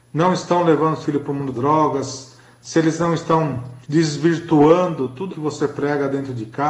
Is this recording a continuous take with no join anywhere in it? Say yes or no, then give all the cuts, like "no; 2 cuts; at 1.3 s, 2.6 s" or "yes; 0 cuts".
no; 4 cuts; at 1.0 s, 1.5 s, 3.8 s, 5.3 s